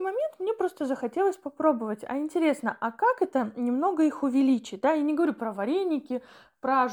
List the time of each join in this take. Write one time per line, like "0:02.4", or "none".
none